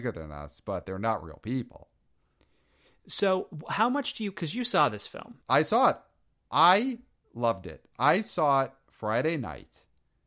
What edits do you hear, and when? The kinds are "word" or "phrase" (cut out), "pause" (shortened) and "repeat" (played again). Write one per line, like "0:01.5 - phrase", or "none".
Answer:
0:05.4 - pause